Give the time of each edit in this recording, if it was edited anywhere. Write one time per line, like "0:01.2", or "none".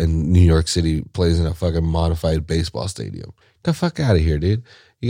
0:03.4